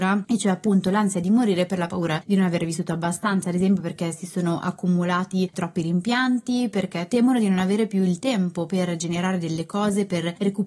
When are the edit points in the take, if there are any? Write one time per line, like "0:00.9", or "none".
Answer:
none